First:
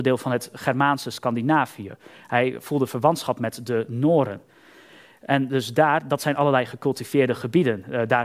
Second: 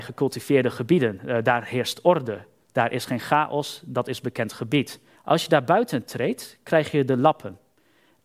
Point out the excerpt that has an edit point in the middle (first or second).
second